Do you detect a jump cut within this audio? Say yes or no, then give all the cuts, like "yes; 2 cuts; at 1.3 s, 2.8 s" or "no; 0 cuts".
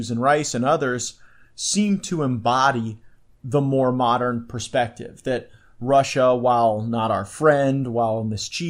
no; 0 cuts